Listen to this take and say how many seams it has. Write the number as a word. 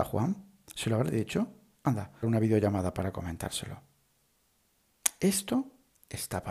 one